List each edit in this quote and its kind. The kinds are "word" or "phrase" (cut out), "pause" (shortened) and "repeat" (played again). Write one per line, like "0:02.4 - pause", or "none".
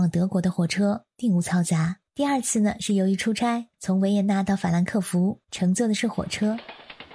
0:01.1 - pause
0:02.1 - pause
0:03.7 - pause
0:05.4 - pause